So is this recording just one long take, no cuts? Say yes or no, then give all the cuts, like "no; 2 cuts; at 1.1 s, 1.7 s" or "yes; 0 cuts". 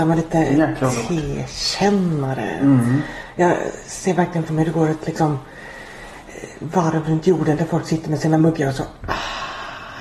no; 1 cut; at 4.5 s